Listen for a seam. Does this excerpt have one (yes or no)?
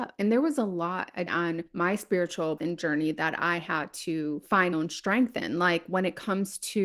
yes